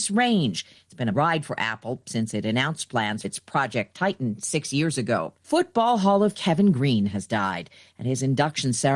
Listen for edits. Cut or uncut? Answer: cut